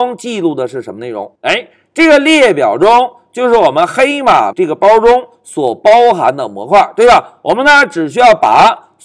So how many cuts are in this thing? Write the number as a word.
two